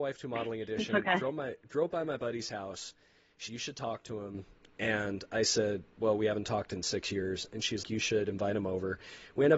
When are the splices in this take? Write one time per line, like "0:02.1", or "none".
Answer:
0:03.5
0:07.8